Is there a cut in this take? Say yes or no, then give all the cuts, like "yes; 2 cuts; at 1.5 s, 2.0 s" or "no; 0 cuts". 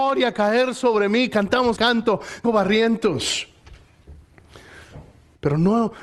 yes; 2 cuts; at 1.8 s, 2.4 s